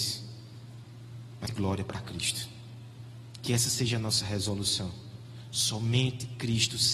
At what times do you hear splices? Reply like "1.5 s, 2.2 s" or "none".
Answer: 1.4 s